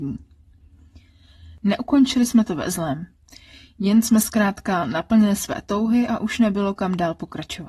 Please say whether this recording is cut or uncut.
uncut